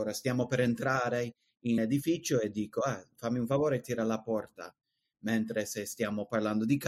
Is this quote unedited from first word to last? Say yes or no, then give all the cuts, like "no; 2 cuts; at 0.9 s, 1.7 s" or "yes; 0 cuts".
no; 1 cut; at 1.8 s